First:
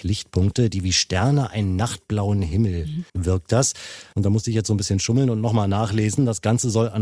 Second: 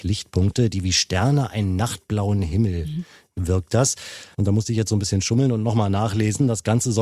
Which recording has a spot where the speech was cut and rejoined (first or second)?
first